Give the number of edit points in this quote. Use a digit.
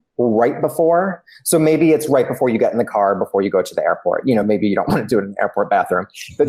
0